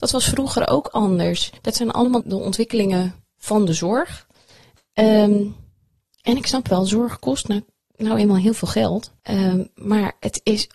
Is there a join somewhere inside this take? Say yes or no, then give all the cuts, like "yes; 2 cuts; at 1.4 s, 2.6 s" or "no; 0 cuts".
yes; 3 cuts; at 1.6 s, 2.2 s, 9.2 s